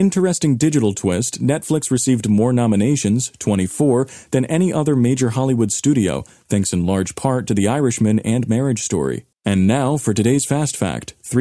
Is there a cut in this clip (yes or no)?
yes